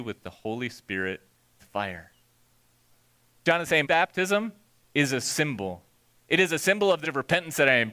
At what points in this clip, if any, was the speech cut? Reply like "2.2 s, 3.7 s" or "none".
1.6 s, 3.8 s, 7.0 s

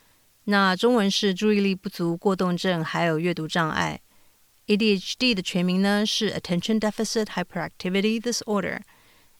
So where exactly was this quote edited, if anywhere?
none

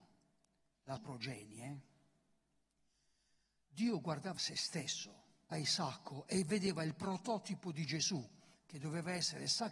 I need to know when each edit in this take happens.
1.0 s, 4.4 s, 5.5 s

